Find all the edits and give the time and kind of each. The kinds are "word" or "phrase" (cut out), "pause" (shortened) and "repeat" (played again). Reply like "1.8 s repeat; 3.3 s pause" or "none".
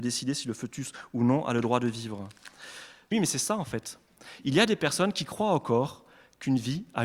3.1 s phrase